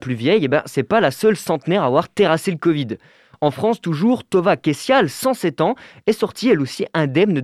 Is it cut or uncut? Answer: uncut